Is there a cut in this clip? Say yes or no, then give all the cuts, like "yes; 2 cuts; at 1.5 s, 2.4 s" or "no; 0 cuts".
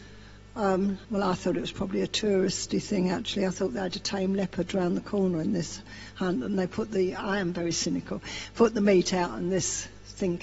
yes; 1 cut; at 1.0 s